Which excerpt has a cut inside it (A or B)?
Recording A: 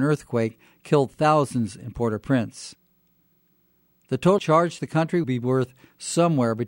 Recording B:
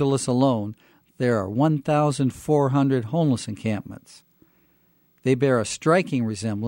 A